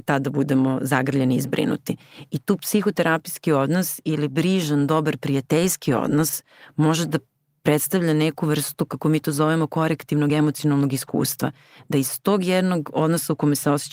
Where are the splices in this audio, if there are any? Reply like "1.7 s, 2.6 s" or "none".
none